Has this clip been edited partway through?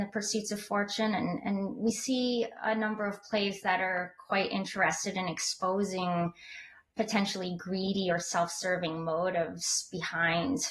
no; 0 cuts

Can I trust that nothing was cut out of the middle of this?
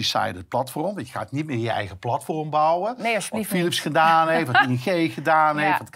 yes; 0 cuts

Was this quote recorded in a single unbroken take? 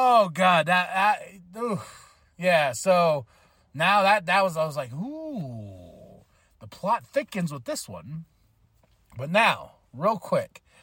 yes; 0 cuts

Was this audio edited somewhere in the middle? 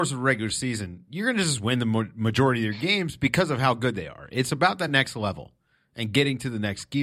no; 0 cuts

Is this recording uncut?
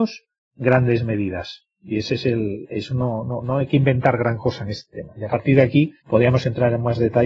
no; 1 cut; at 6.0 s

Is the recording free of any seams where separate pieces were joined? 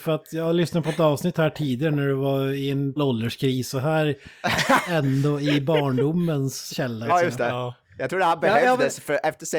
no; 4 cuts; at 3.0 s, 4.9 s, 6.7 s, 7.1 s

